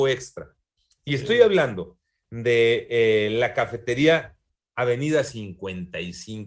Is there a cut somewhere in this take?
no; 0 cuts

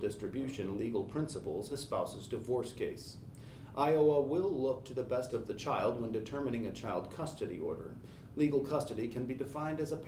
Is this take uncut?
no; 2 cuts; at 1.7 s, 5.3 s

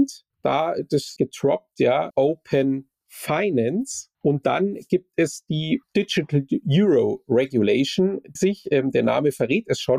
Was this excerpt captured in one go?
no; 5 cuts; at 1.2 s, 2.1 s, 4.1 s, 5.8 s, 8.4 s

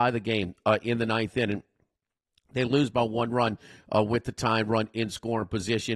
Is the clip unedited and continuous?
yes; 0 cuts

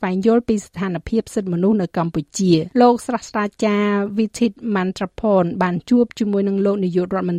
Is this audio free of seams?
no; 1 cut; at 2.7 s

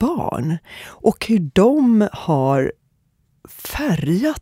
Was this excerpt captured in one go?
yes; 0 cuts

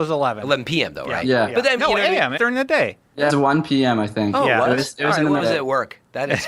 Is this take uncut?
no; 4 cuts; at 1.8 s, 2.4 s, 3.3 s, 5.4 s

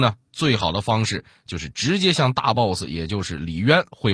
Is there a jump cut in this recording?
no; 0 cuts

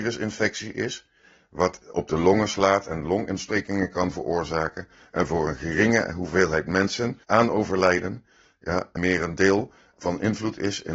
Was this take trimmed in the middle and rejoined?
yes; 2 cuts; at 7.2 s, 9.0 s

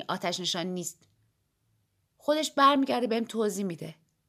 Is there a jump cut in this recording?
no; 0 cuts

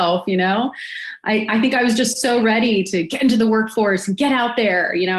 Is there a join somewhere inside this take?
no; 0 cuts

